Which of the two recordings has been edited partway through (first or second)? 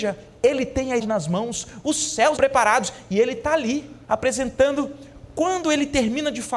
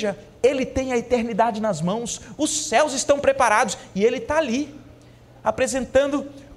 first